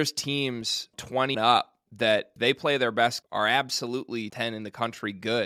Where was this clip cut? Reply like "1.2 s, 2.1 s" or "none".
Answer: 0.9 s, 1.3 s, 2.4 s, 3.2 s, 4.3 s